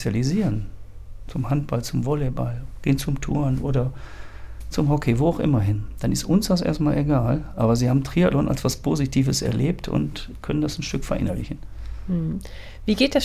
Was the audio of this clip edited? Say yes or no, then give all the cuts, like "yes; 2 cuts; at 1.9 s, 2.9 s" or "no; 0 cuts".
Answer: no; 0 cuts